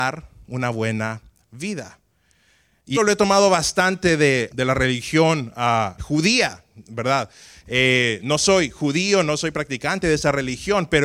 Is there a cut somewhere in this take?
yes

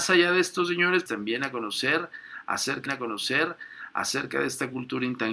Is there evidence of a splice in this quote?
yes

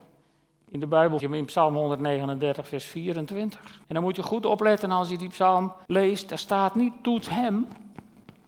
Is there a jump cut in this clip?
yes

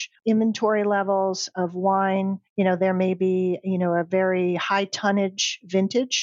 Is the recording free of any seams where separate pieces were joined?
yes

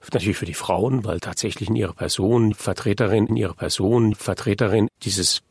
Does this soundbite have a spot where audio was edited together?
yes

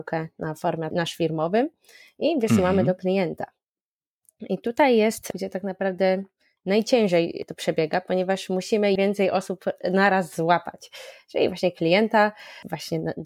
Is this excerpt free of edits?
no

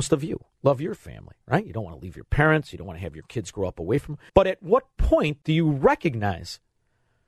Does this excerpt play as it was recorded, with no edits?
no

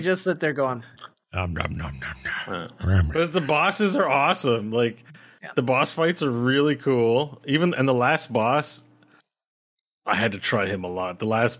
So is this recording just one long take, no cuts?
yes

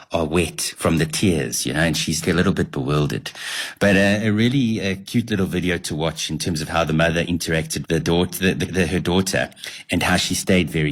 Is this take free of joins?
no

